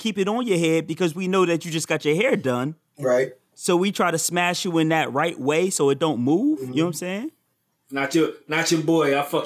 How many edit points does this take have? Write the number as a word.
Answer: zero